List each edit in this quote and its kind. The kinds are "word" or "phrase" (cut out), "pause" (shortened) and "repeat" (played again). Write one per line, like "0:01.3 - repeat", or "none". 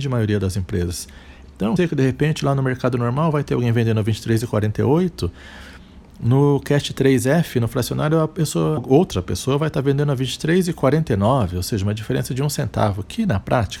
0:01.8 - phrase
0:08.8 - word